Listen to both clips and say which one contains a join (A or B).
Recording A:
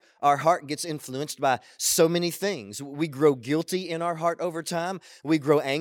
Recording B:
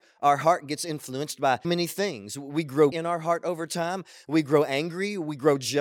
B